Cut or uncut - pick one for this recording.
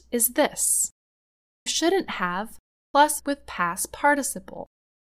cut